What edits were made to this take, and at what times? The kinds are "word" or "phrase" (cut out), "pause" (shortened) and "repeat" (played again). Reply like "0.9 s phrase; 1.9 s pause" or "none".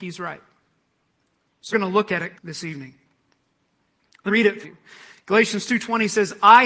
1.7 s word; 2.3 s word; 4.3 s word; 4.6 s word